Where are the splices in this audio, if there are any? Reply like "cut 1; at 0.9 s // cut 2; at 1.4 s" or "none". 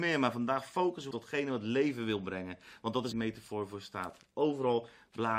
cut 1; at 1.1 s // cut 2; at 3.1 s